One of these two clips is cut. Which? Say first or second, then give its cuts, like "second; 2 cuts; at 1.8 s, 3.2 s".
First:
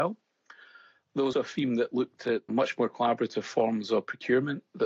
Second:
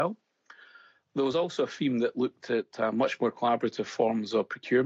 first; 2 cuts; at 1.3 s, 2.5 s